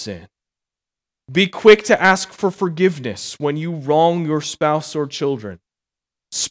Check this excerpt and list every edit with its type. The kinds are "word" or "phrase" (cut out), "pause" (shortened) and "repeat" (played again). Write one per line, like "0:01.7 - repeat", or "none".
none

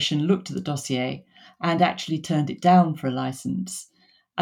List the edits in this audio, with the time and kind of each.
none

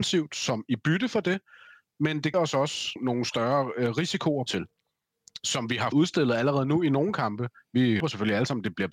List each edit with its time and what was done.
0:02.3 - word
0:03.0 - word
0:04.5 - word
0:05.9 - word
0:08.0 - word

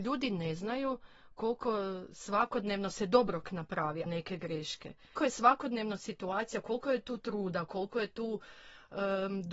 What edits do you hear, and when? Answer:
0:04.1 - phrase
0:05.2 - word

